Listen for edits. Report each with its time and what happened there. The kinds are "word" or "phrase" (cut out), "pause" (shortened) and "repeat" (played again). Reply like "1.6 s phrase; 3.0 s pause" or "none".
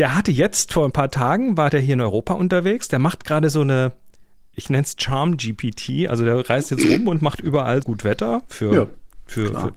7.8 s word